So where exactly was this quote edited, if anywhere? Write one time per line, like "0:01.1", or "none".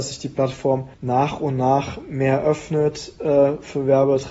none

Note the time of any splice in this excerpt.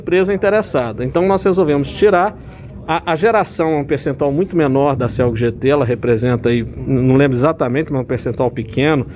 none

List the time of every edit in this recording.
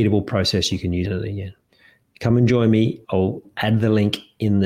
0:01.0
0:01.7
0:03.0

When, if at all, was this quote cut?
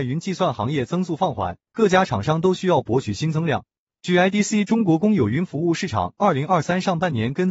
0:01.6

